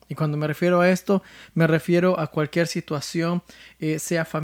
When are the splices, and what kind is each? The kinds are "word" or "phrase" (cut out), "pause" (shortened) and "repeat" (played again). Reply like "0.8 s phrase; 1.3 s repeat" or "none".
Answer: none